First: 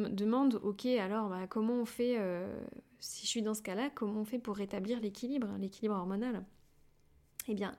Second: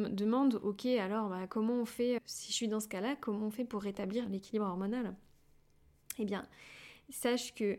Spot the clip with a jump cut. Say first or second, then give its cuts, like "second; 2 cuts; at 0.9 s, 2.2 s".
second; 2 cuts; at 2.2 s, 4.3 s